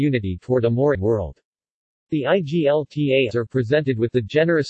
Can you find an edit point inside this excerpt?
yes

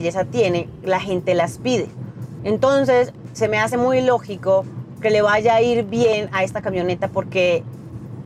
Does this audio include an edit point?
no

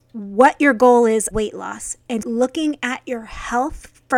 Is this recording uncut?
no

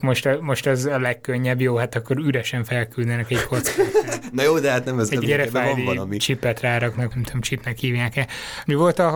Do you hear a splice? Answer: yes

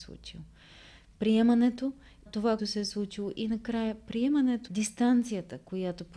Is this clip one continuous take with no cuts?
no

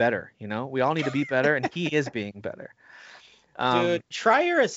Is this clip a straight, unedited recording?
yes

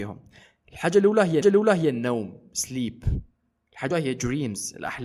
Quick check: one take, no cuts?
no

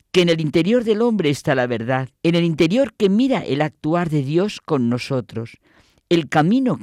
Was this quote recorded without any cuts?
no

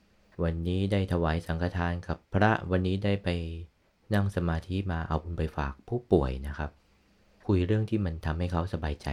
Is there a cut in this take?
no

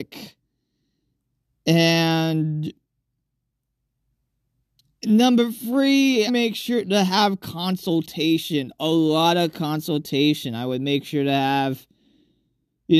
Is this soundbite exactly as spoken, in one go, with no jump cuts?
no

